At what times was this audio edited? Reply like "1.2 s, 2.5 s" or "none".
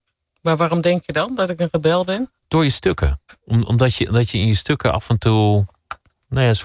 2.4 s